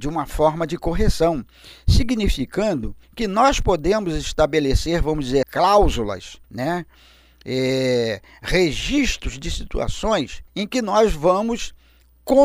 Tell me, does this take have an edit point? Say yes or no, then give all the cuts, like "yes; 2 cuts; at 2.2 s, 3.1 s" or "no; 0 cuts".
yes; 4 cuts; at 3.0 s, 5.4 s, 6.4 s, 10.5 s